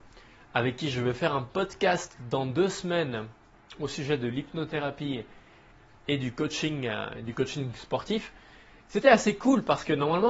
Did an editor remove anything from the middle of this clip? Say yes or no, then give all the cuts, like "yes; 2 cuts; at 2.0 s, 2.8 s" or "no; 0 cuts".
no; 0 cuts